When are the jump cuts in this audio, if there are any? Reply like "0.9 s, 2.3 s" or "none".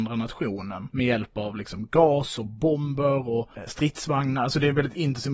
none